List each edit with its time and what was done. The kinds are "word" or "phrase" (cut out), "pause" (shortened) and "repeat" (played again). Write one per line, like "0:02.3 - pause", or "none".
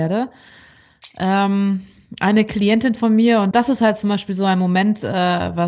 0:03.5 - word